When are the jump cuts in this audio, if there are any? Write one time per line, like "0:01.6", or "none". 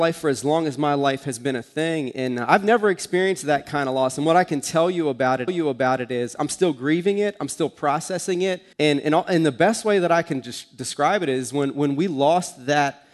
0:05.5
0:08.7